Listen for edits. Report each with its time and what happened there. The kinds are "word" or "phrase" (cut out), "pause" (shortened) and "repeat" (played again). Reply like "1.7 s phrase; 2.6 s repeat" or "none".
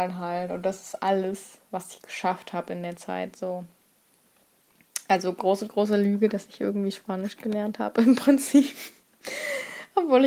none